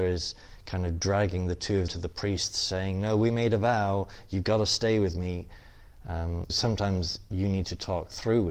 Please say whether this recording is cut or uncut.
cut